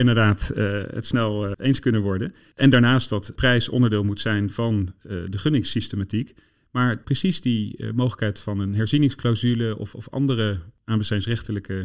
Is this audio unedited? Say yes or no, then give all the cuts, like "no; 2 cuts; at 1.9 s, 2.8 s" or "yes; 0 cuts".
no; 1 cut; at 1.5 s